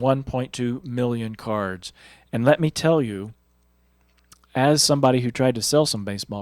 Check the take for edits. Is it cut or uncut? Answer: uncut